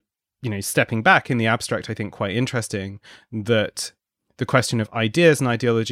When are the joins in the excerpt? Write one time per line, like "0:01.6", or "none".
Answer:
none